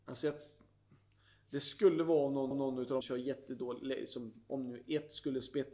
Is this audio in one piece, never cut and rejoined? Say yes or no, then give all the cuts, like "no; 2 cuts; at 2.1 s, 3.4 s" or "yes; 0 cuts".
no; 2 cuts; at 2.5 s, 3.0 s